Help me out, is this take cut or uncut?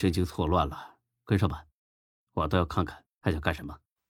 uncut